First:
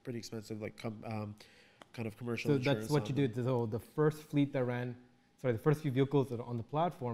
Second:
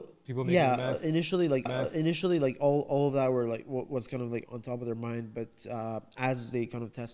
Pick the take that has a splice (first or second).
second